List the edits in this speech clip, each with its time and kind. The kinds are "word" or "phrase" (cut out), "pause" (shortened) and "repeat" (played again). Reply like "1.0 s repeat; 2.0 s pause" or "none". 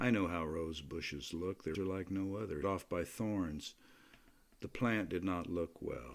1.7 s word; 2.6 s word

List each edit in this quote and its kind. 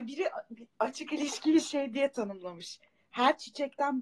none

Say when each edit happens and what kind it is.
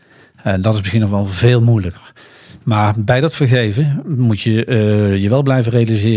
none

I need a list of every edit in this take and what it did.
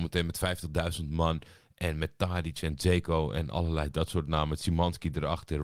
none

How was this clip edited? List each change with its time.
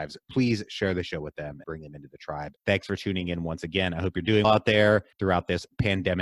1.6 s word; 2.6 s pause; 4.4 s word; 5.1 s pause

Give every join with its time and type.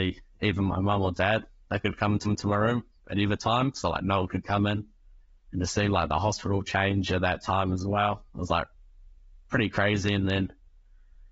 2.2 s repeat

